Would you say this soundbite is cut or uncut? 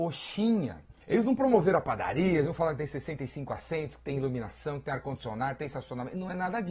cut